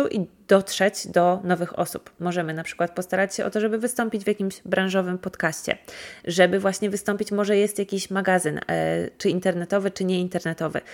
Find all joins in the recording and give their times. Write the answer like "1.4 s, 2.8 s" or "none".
none